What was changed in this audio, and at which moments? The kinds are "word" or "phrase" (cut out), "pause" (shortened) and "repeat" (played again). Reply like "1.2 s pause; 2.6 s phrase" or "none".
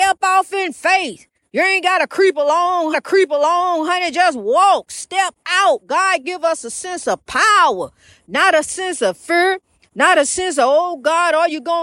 2.9 s repeat